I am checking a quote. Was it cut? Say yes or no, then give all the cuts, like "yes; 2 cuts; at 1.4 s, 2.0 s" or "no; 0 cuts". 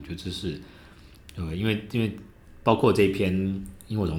yes; 1 cut; at 1.2 s